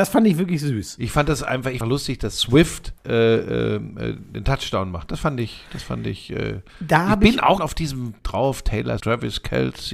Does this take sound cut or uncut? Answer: cut